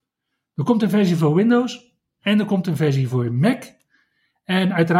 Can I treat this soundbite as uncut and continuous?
yes; 0 cuts

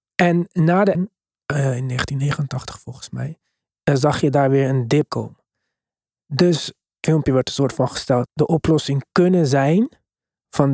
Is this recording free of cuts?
no; 4 cuts; at 0.9 s, 5.1 s, 7.0 s, 8.3 s

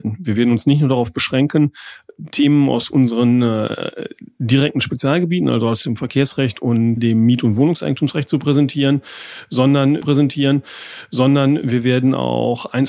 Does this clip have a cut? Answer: yes; 2 cuts; at 7.0 s, 10.0 s

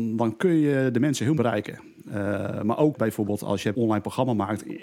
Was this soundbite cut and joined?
yes; 3 cuts; at 1.4 s, 2.9 s, 3.7 s

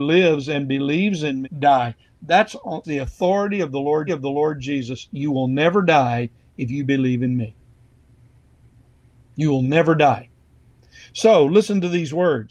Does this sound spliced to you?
yes; 3 cuts; at 1.4 s, 2.8 s, 4.1 s

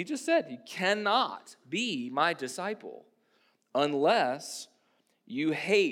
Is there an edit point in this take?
no; 0 cuts

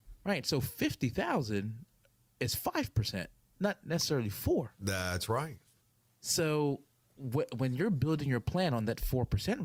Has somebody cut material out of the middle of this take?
no; 0 cuts

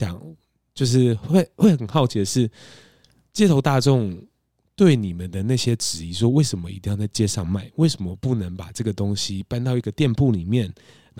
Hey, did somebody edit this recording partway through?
no; 0 cuts

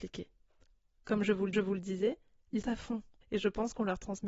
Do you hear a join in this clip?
yes; 3 cuts; at 1.5 s, 2.6 s, 3.2 s

